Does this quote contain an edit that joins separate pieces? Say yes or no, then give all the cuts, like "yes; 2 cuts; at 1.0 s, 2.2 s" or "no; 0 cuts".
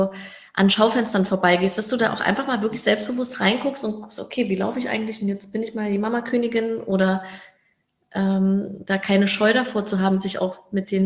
no; 0 cuts